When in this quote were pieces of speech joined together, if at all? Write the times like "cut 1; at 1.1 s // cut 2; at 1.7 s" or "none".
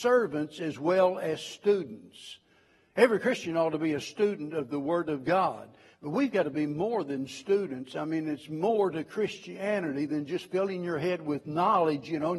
none